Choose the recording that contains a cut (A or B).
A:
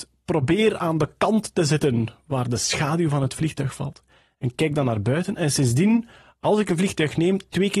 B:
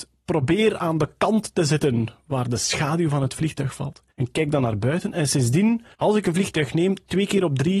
B